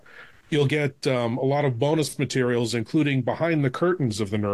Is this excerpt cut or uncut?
uncut